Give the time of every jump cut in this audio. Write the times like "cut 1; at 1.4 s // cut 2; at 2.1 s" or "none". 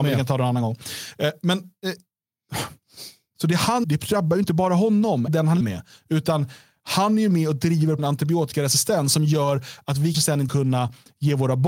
cut 1; at 3.8 s // cut 2; at 5.3 s // cut 3; at 5.6 s // cut 4; at 8.0 s // cut 5; at 10.1 s // cut 6; at 10.5 s